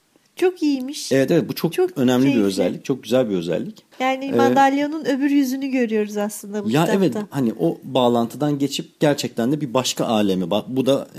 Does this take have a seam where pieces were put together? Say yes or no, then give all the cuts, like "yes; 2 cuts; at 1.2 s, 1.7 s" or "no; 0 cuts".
yes; 1 cut; at 3.9 s